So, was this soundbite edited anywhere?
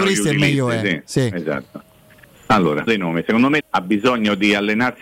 yes; 2 cuts; at 2.9 s, 3.6 s

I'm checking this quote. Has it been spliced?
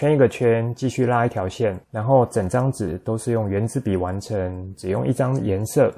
yes; 1 cut; at 1.8 s

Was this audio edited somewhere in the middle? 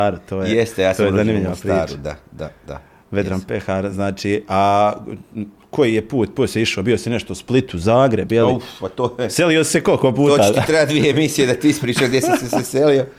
no; 0 cuts

